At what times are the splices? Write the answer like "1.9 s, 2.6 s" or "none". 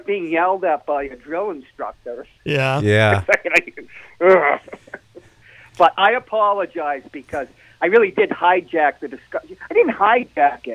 none